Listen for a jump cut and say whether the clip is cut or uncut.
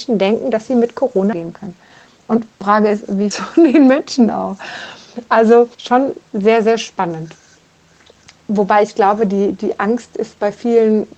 cut